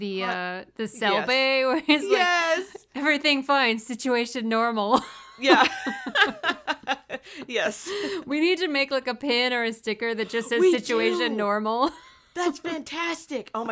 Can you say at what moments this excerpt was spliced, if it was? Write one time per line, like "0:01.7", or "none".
none